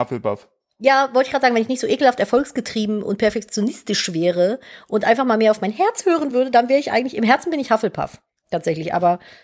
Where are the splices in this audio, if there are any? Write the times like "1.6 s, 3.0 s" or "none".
none